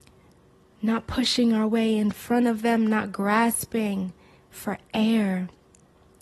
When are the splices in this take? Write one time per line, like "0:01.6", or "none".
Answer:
0:04.4